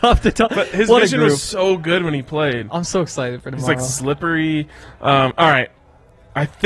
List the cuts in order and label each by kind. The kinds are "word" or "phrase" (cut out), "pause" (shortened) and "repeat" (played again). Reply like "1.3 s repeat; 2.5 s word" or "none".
none